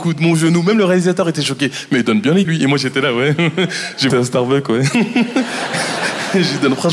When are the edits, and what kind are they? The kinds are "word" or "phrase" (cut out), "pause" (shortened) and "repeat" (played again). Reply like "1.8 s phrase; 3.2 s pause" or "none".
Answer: 2.4 s word; 4.1 s word